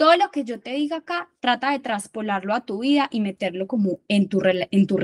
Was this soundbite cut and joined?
no; 0 cuts

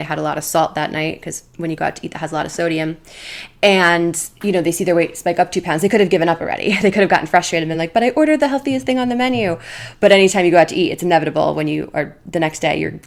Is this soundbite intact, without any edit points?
yes; 0 cuts

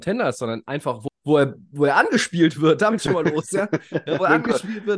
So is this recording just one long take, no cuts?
no; 2 cuts; at 1.1 s, 3.0 s

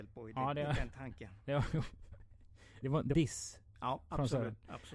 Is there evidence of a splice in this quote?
yes; 2 cuts; at 2.8 s, 3.1 s

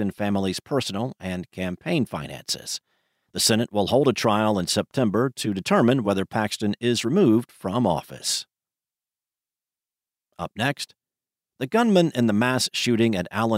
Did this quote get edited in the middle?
no; 0 cuts

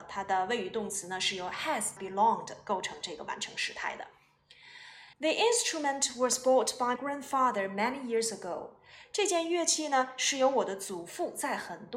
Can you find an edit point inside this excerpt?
yes; 3 cuts; at 2.0 s, 5.1 s, 7.0 s

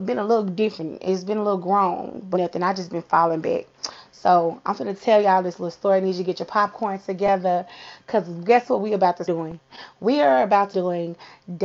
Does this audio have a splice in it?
yes; 3 cuts; at 2.3 s, 9.3 s, 10.7 s

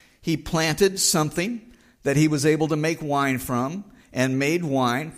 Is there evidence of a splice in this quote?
no; 0 cuts

